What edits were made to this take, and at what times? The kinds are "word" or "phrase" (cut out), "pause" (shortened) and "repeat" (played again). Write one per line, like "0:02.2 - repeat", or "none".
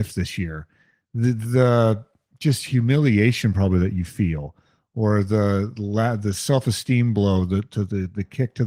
none